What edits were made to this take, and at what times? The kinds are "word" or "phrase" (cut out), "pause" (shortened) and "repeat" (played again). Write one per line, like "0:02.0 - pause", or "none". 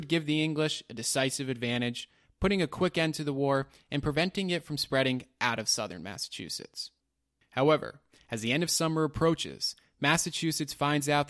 none